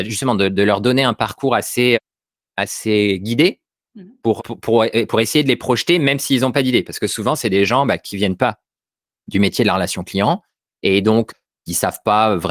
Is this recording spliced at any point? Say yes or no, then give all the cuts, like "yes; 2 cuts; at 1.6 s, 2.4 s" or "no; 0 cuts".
no; 0 cuts